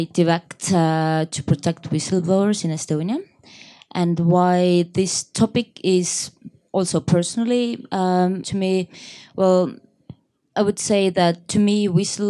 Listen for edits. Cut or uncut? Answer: cut